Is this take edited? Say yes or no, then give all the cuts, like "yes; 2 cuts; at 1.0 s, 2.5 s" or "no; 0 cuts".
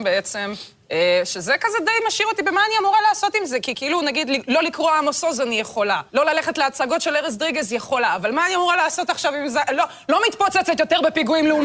yes; 1 cut; at 6.1 s